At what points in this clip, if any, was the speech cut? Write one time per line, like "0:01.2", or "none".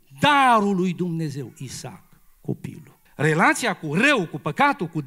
0:03.1